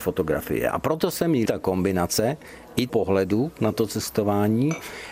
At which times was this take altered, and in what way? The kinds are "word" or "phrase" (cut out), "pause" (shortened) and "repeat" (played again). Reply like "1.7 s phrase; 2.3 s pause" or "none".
1.5 s word; 2.9 s phrase